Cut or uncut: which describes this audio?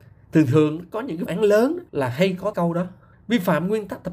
cut